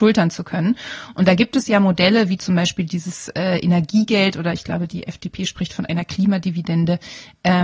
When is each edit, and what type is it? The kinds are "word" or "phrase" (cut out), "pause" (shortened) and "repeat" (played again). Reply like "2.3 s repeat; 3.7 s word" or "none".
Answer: none